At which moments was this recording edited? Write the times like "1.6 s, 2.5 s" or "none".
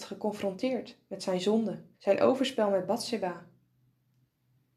1.9 s